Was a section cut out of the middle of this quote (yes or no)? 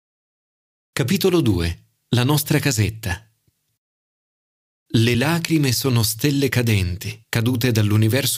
no